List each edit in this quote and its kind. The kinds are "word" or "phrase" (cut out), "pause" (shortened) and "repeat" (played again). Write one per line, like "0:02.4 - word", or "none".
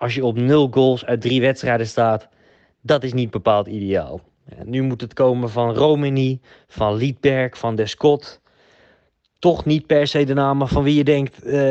none